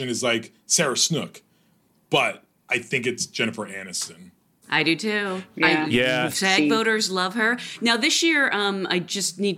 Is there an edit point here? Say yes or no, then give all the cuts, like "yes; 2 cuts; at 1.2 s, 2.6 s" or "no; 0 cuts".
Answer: no; 0 cuts